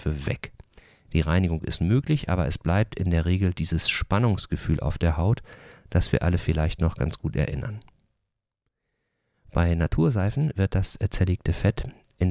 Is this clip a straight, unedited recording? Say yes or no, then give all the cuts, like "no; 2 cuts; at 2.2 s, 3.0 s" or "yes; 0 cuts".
yes; 0 cuts